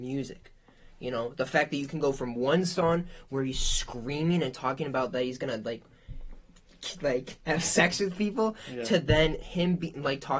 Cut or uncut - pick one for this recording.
uncut